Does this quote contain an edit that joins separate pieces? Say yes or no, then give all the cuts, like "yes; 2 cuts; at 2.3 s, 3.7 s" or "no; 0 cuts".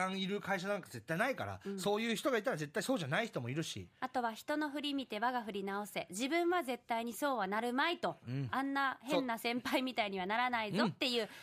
yes; 1 cut; at 3.9 s